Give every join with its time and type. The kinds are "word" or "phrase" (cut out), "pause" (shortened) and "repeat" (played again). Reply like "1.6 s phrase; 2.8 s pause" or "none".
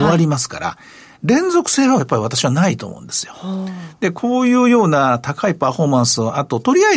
none